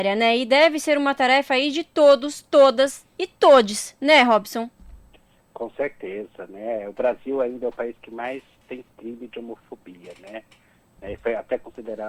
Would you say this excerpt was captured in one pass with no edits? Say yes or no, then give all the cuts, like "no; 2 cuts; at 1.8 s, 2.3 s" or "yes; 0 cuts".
yes; 0 cuts